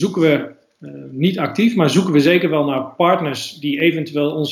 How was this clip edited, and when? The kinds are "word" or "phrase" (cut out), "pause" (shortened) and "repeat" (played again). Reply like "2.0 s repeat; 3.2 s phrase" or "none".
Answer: none